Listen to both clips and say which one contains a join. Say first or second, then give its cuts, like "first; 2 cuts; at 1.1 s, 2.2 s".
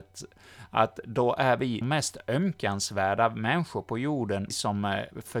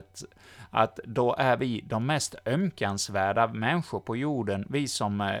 first; 2 cuts; at 1.8 s, 4.5 s